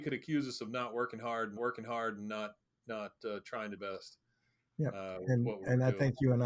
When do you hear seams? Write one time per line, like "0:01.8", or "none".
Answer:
0:01.6
0:03.8